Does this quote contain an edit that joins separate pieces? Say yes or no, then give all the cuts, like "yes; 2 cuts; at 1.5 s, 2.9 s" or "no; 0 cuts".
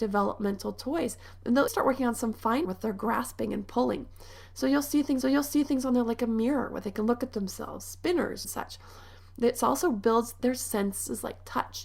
yes; 4 cuts; at 1.7 s, 2.6 s, 5.2 s, 8.4 s